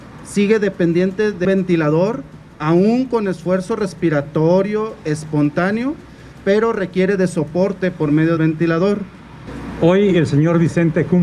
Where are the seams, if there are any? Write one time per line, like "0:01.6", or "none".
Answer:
0:01.4
0:08.4